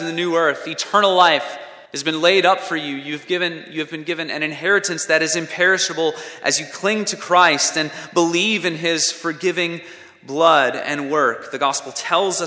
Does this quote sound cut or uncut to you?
cut